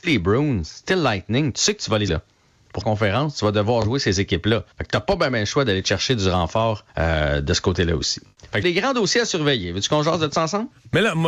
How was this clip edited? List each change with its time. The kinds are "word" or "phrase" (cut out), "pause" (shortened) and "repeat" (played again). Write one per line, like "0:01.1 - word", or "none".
0:02.1 - word
0:02.8 - phrase
0:04.7 - pause
0:06.9 - pause
0:08.6 - word

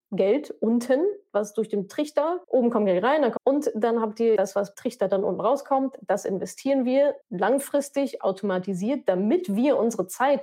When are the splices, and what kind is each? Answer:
0:02.4 - pause
0:03.4 - phrase
0:04.4 - word
0:04.7 - word
0:07.2 - pause

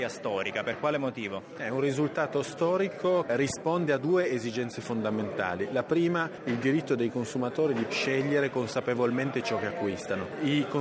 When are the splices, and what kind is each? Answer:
0:03.3 - word
0:07.9 - word

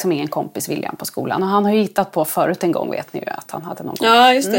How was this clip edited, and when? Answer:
none

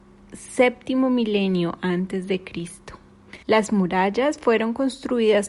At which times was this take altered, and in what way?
0:03.4 - pause

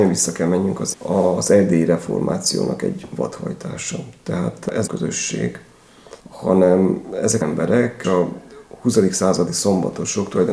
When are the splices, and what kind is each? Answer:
0:00.9 - word
0:04.9 - phrase
0:06.2 - pause
0:07.4 - word
0:08.0 - word

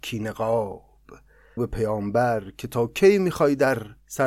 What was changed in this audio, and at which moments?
0:01.6 - word

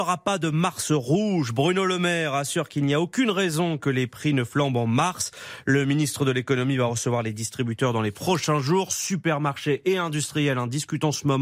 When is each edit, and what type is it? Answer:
none

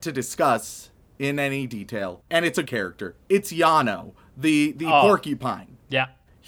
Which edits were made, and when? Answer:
0:02.3 - word
0:02.6 - word

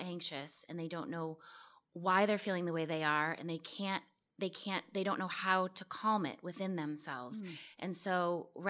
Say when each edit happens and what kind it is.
none

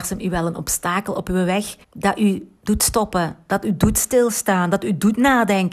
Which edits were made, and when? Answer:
0:01.8 - pause

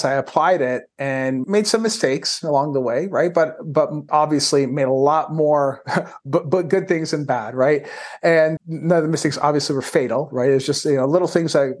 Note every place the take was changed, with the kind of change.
0:01.4 - word
0:04.1 - word
0:08.6 - word

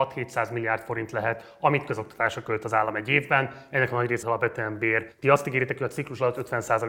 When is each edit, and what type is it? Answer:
0:04.2 - word
0:05.1 - pause

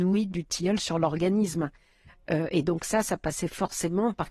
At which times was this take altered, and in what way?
none

